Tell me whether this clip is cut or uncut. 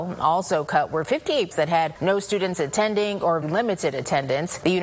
cut